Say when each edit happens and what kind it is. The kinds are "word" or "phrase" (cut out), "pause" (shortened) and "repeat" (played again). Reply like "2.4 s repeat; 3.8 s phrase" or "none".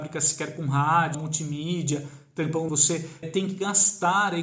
1.1 s word; 2.7 s phrase; 3.2 s word